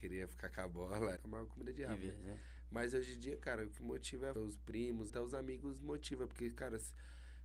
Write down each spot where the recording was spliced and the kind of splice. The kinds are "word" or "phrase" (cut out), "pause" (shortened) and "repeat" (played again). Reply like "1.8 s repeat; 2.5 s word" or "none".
1.2 s word; 4.4 s word; 5.1 s word